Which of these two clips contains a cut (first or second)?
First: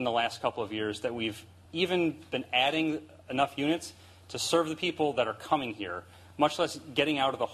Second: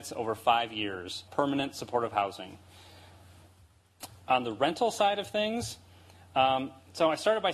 second